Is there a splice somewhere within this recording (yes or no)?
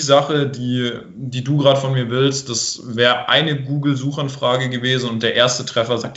no